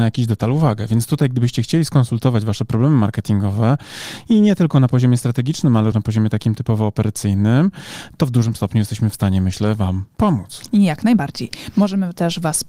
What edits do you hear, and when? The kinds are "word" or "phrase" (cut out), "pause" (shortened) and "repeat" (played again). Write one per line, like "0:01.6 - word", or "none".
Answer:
0:05.9 - word